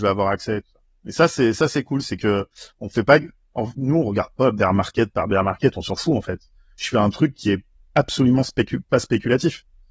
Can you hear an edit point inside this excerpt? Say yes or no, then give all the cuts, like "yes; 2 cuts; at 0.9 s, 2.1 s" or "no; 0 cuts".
no; 0 cuts